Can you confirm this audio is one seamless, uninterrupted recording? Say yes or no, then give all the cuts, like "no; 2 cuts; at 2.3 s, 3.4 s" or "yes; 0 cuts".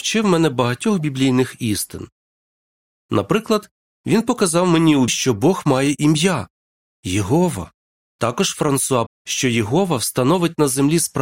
no; 3 cuts; at 5.1 s, 8.0 s, 9.1 s